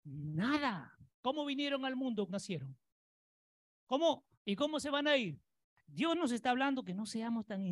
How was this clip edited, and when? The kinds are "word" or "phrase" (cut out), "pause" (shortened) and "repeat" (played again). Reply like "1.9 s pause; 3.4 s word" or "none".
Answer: 1.1 s pause; 2.3 s word; 4.3 s pause